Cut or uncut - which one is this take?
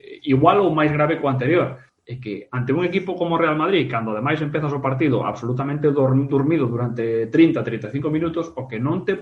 cut